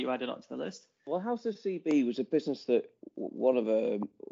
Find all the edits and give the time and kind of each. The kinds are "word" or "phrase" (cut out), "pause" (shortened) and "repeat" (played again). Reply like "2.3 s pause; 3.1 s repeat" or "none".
none